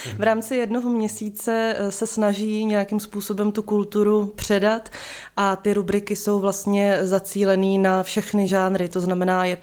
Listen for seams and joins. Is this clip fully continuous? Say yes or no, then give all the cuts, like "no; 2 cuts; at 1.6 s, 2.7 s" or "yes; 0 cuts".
yes; 0 cuts